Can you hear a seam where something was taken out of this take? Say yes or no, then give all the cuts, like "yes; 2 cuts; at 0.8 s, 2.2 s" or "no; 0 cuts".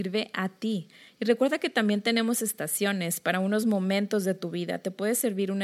no; 0 cuts